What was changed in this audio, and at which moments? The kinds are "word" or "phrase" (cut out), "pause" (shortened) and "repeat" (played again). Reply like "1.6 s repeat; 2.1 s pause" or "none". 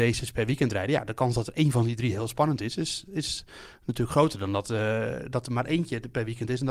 none